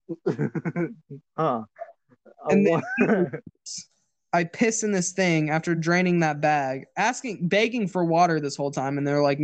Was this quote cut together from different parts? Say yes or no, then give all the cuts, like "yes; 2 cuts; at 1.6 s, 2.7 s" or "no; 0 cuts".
no; 0 cuts